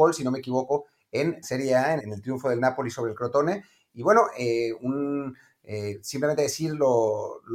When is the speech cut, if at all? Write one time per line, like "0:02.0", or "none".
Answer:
0:01.4
0:02.0